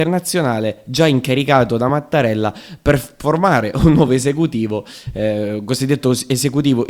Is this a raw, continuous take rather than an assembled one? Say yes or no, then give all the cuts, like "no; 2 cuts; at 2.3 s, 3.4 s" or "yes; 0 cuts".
yes; 0 cuts